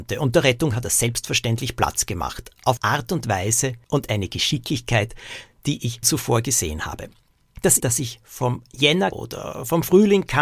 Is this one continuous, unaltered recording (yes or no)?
no